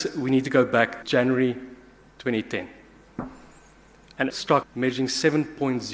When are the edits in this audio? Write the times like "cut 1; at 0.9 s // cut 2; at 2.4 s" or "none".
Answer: cut 1; at 1.0 s // cut 2; at 4.3 s // cut 3; at 4.6 s